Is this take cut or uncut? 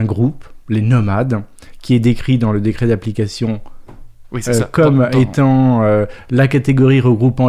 uncut